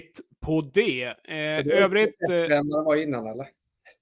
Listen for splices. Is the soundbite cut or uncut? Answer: uncut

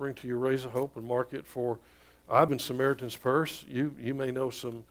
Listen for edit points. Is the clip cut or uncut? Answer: cut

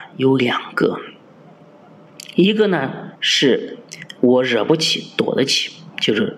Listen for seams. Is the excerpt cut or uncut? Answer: cut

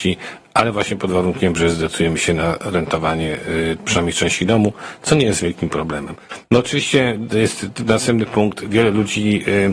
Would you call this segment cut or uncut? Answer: uncut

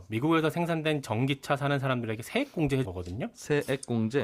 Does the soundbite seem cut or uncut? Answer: cut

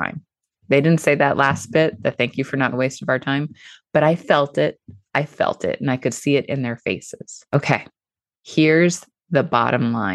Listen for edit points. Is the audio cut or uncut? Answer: cut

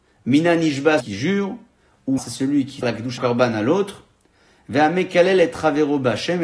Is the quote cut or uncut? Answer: cut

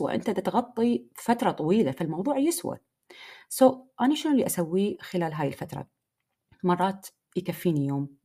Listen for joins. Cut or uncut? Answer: uncut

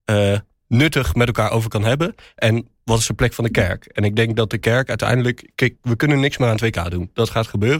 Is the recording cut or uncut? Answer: uncut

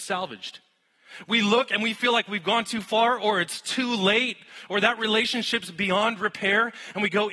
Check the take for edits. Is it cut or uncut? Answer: uncut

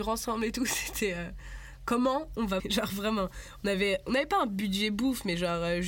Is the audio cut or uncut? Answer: cut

